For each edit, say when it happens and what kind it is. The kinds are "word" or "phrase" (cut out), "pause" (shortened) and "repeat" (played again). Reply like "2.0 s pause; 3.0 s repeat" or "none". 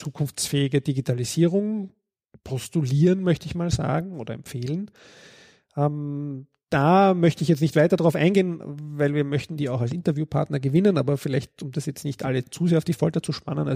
none